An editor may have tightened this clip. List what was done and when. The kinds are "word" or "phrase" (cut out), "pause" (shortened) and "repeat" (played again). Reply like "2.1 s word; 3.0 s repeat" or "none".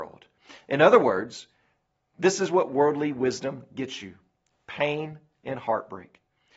none